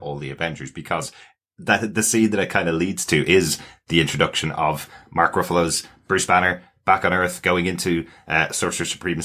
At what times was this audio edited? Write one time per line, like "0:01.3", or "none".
none